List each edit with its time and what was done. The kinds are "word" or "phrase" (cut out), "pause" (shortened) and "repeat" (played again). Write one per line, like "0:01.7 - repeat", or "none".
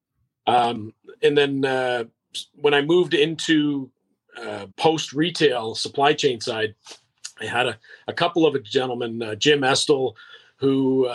0:04.7 - pause